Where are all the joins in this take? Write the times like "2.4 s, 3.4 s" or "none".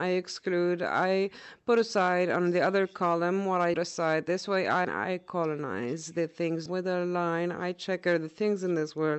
3.7 s, 4.8 s, 6.7 s